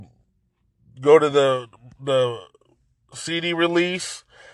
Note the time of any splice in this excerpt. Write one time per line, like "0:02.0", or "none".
none

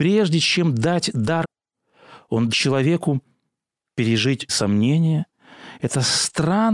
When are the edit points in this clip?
0:01.4
0:02.5
0:04.5

